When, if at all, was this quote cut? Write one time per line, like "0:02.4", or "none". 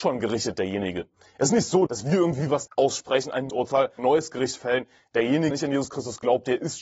0:01.9
0:02.7
0:03.5
0:04.0
0:05.5